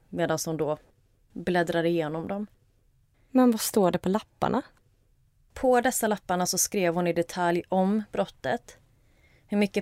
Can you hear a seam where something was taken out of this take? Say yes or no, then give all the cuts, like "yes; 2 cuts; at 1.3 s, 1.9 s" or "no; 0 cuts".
no; 0 cuts